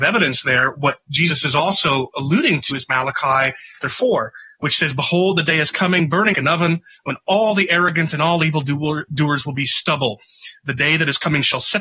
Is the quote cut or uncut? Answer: cut